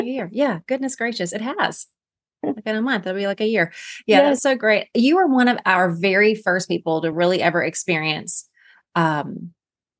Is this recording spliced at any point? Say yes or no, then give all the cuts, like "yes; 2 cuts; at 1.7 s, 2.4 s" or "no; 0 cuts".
no; 0 cuts